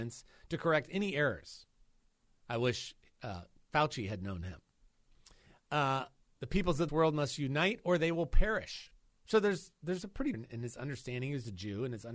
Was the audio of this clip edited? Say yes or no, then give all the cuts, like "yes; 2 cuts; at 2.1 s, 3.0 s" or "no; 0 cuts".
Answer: yes; 3 cuts; at 6.9 s, 9.0 s, 10.3 s